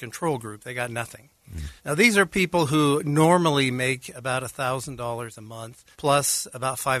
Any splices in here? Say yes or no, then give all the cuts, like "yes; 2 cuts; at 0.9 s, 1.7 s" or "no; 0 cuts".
yes; 2 cuts; at 1.8 s, 5.9 s